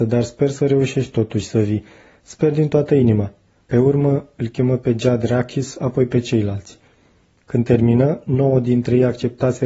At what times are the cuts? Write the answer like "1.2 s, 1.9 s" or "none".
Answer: none